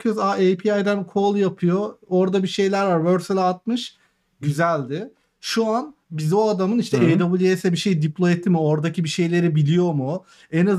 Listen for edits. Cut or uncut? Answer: uncut